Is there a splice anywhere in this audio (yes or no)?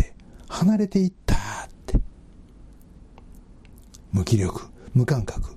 yes